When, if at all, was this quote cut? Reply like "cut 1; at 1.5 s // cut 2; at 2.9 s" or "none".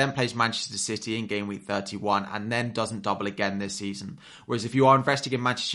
none